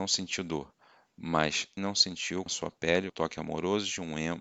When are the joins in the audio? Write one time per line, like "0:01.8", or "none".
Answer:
0:01.8
0:02.5
0:03.1